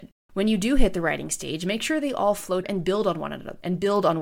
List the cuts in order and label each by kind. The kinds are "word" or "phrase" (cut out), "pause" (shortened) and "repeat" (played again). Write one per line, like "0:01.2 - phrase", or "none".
0:02.6 - word